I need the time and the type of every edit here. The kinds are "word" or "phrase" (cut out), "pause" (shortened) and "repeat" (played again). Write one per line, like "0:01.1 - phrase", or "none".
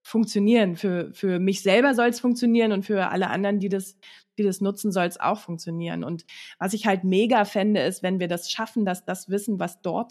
none